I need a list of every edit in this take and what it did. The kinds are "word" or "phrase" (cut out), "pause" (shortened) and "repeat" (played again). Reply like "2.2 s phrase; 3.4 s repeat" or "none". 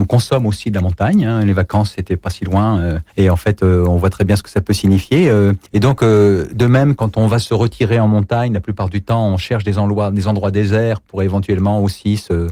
3.1 s pause; 5.7 s pause; 7.0 s word